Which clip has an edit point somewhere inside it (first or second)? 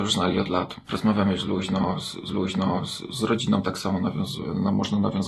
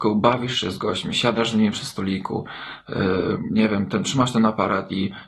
first